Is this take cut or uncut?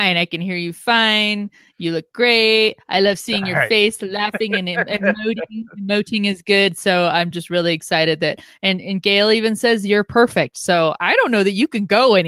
uncut